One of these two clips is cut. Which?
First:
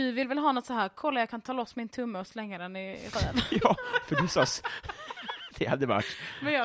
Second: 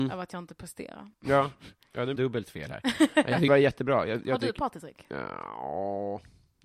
second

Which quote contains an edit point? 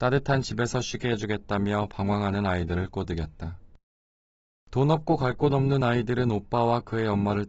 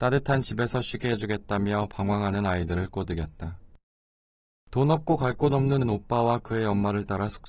second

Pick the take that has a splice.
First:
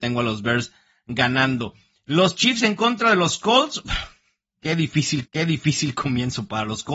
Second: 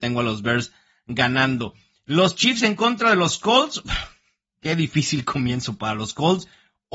first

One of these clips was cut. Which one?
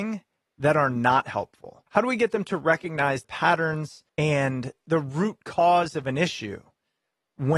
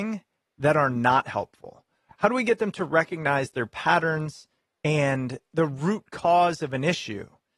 first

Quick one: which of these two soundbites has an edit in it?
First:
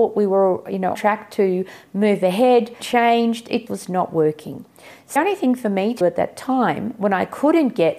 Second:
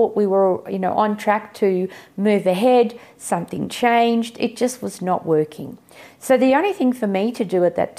first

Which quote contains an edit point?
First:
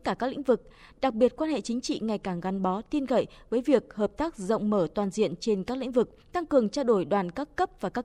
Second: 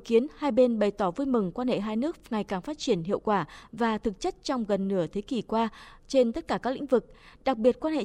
first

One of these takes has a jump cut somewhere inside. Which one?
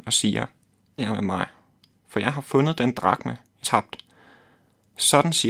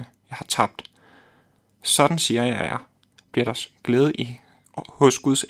first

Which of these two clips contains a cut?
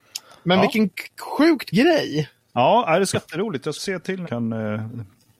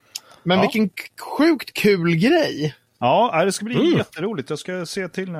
first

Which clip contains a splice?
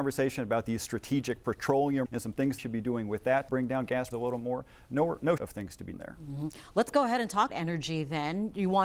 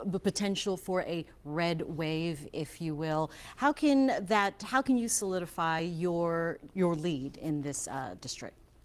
first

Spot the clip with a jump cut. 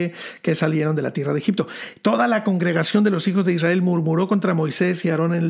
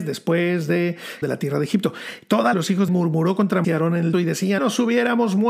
second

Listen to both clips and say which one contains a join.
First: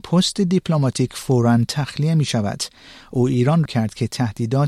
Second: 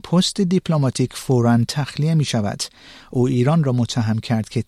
first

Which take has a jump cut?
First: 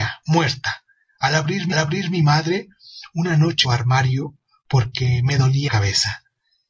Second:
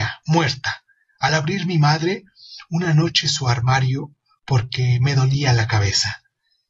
first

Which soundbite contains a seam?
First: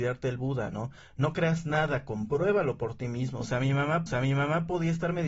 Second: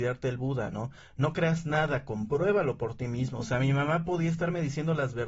first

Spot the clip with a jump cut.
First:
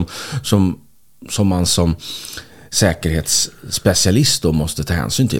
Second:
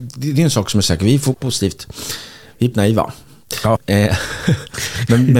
second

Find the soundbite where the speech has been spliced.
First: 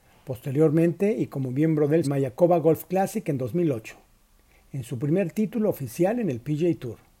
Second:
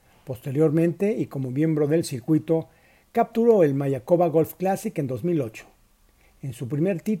first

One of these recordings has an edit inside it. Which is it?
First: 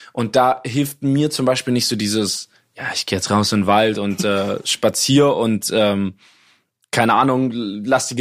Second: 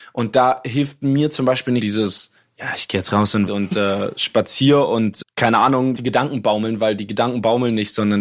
second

